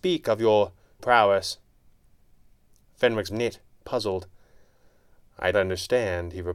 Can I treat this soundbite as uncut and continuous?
no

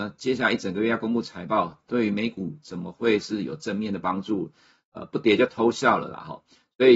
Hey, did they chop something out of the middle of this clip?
no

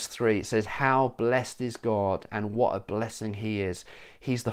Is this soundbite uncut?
yes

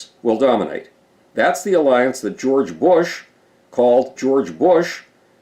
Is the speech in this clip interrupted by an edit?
yes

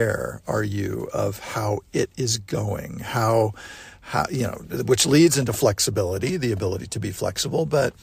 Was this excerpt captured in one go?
yes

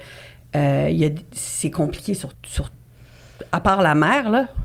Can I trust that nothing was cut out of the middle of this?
no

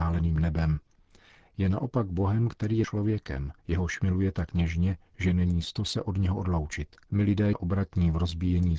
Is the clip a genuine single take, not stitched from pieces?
no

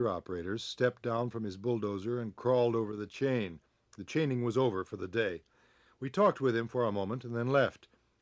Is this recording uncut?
yes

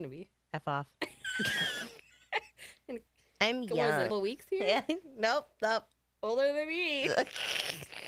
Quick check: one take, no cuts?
no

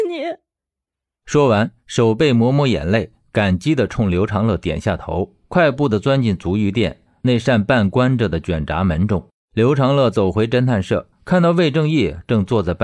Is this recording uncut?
no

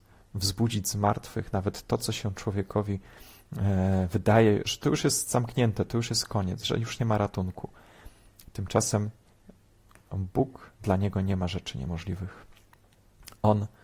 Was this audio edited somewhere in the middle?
yes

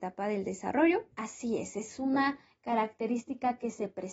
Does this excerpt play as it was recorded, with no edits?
no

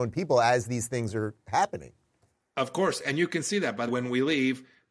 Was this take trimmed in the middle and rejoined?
yes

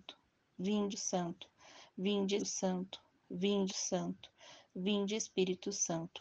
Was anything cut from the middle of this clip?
yes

